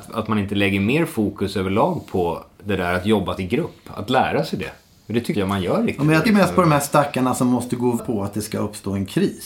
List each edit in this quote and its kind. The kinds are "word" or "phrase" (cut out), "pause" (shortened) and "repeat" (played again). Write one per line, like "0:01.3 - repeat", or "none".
0:03.4 - word
0:05.3 - word
0:06.2 - word
0:08.0 - word

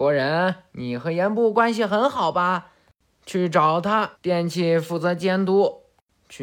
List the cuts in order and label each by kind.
0:04.1 - pause

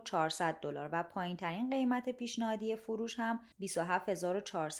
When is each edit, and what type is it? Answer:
0:03.5 - pause

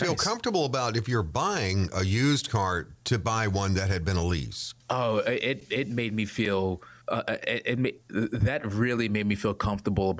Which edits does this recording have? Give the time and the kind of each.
0:04.8 - pause
0:07.0 - pause

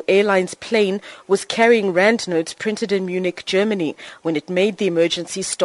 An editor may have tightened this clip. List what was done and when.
none

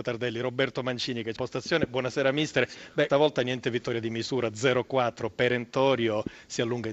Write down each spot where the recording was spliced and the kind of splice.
0:01.4 - phrase
0:03.1 - word

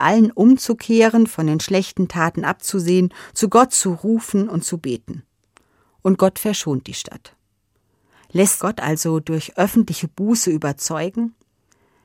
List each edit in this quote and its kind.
0:08.6 - word

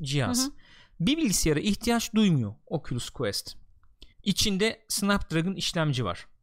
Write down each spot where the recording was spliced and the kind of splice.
0:04.1 - pause

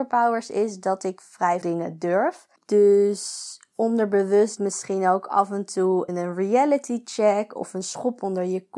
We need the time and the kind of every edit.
0:01.6 - word
0:02.6 - pause
0:04.6 - phrase
0:06.1 - word

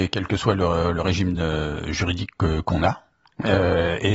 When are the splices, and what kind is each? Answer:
none

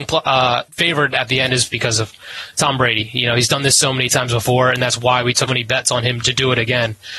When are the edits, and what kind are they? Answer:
0:01.7 - word
0:05.5 - word

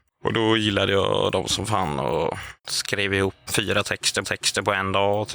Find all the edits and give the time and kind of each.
0:02.6 - pause
0:03.5 - word
0:04.2 - repeat

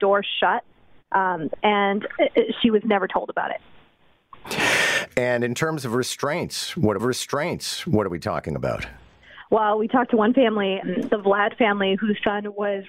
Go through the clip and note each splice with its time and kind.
0:01.6 - phrase
0:07.0 - repeat
0:10.8 - word

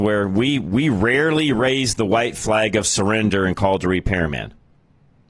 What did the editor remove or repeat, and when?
none

